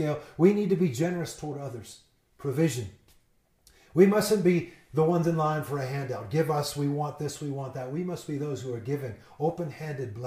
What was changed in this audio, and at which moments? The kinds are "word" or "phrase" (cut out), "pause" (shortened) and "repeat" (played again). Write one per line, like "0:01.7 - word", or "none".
none